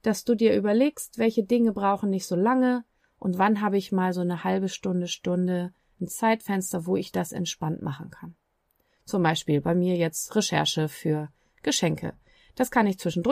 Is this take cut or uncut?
uncut